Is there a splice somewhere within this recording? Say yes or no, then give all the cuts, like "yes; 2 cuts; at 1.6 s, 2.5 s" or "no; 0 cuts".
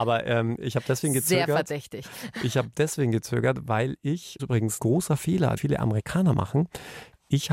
yes; 3 cuts; at 4.4 s, 4.8 s, 5.6 s